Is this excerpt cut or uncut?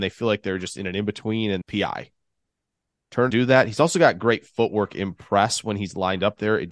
cut